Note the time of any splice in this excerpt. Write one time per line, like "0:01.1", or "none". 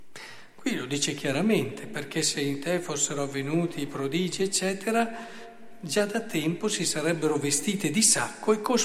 none

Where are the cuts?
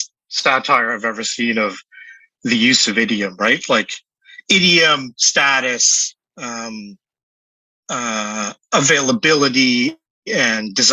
0:06.2

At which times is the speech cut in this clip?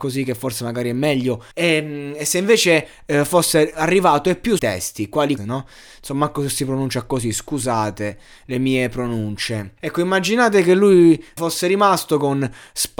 0:01.5
0:04.6
0:05.4
0:09.8
0:11.4

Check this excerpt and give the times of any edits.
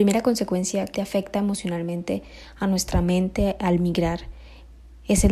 0:00.9

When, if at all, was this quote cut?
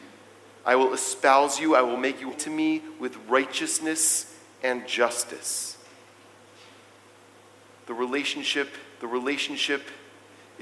0:02.3
0:09.0

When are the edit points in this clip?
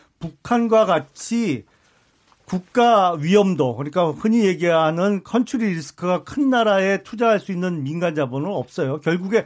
none

